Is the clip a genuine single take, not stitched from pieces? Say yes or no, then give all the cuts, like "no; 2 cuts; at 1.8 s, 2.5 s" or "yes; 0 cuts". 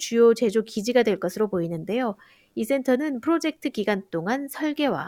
yes; 0 cuts